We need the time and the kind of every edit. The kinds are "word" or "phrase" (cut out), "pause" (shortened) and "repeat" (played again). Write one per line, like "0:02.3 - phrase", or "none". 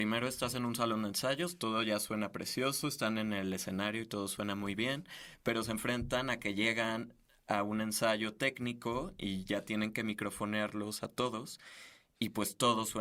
none